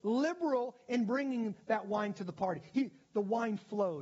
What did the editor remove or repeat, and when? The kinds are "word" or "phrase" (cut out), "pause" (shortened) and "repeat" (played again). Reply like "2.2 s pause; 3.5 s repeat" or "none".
none